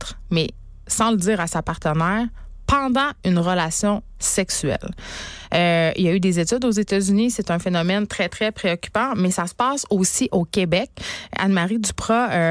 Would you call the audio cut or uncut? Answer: uncut